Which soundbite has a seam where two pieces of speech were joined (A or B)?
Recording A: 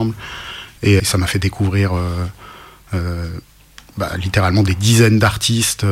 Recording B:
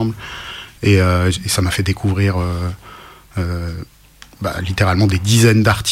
A